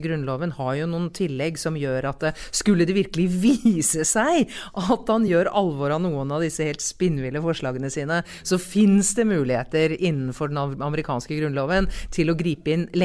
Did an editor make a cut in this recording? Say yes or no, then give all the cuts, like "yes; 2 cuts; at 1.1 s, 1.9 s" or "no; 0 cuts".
no; 0 cuts